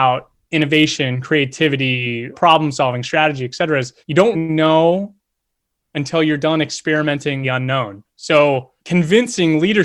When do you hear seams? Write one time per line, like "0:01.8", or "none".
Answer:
0:02.3
0:04.0
0:04.3
0:07.4
0:08.8